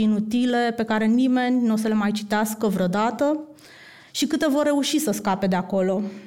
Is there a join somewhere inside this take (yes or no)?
no